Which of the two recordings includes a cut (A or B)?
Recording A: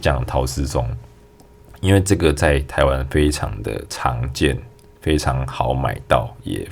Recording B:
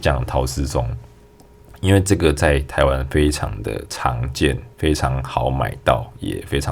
B